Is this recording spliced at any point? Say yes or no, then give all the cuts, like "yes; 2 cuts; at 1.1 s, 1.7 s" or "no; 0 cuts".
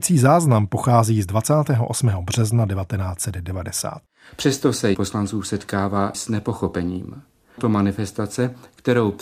yes; 3 cuts; at 4.9 s, 6.1 s, 7.6 s